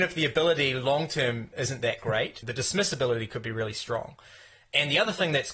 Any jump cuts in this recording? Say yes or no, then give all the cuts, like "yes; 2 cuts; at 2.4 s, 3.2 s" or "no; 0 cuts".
yes; 1 cut; at 2.4 s